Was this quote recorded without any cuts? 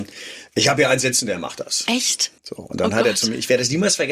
no; 1 cut; at 2.4 s

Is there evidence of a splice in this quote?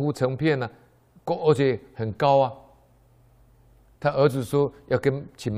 no; 0 cuts

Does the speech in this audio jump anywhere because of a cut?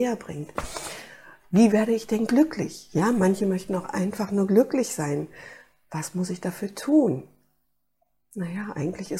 no; 0 cuts

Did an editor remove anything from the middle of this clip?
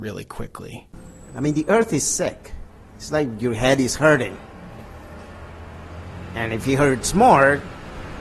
no; 0 cuts

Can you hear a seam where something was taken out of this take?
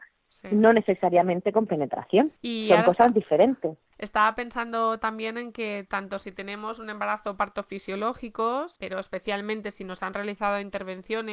yes; 1 cut; at 2.4 s

